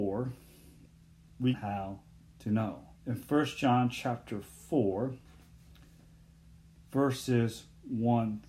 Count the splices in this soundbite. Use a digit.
2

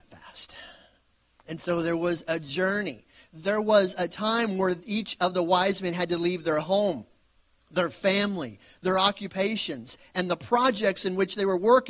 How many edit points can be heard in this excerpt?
0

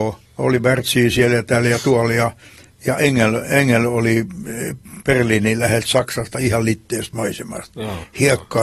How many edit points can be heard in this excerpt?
0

